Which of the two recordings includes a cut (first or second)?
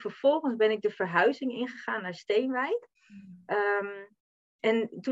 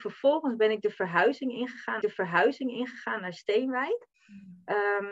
second